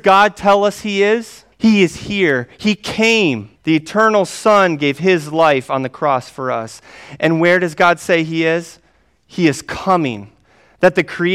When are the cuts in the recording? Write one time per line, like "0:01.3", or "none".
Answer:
0:01.5
0:03.6